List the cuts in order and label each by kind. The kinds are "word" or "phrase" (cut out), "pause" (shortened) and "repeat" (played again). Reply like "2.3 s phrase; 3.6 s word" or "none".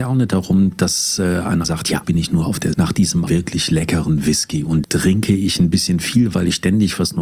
1.6 s word; 2.0 s word; 2.7 s word; 3.3 s word; 4.8 s word